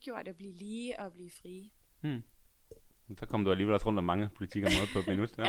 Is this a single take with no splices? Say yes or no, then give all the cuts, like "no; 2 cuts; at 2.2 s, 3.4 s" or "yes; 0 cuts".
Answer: yes; 0 cuts